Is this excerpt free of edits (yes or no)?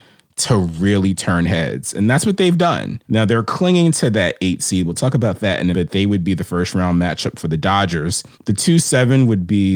no